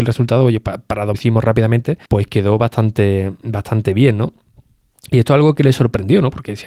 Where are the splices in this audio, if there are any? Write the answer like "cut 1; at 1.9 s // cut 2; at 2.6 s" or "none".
cut 1; at 1.1 s // cut 2; at 2.1 s